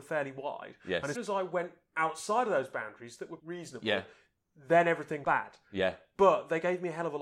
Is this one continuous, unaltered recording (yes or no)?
no